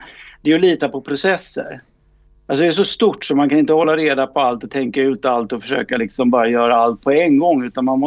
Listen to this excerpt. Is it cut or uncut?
uncut